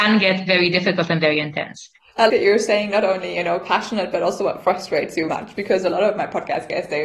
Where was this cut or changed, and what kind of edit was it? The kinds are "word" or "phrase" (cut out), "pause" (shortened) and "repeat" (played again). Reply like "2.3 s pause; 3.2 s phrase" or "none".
2.3 s word; 5.3 s word

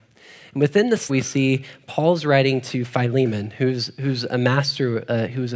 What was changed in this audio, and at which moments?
1.1 s word

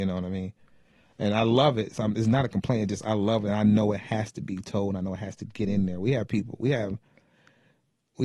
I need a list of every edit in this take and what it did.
none

